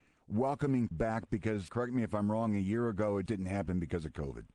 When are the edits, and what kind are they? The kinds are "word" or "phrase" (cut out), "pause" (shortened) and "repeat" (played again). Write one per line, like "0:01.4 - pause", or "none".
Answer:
0:00.9 - word
0:01.7 - word
0:03.3 - word